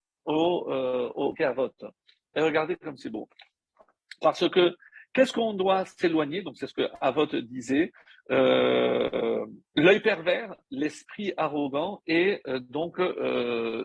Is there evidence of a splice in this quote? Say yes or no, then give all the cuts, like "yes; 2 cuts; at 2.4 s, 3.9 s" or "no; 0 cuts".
yes; 2 cuts; at 1.3 s, 9.7 s